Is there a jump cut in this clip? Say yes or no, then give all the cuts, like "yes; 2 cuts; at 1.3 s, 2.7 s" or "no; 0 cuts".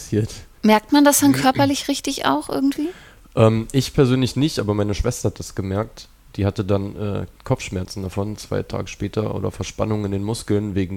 no; 0 cuts